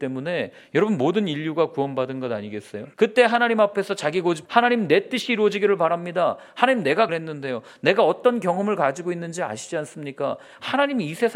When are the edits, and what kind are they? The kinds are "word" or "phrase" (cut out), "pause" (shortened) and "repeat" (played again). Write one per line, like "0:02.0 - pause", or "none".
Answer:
0:02.9 - pause
0:04.4 - word
0:07.1 - phrase